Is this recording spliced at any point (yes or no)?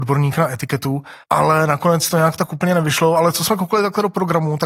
yes